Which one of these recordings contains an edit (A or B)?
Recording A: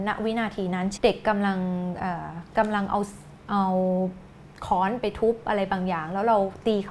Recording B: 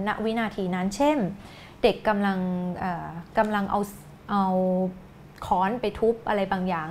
A